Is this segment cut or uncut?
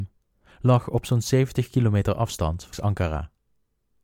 cut